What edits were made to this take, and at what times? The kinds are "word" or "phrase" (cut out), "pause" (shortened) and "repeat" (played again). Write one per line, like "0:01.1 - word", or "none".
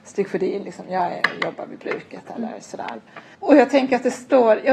none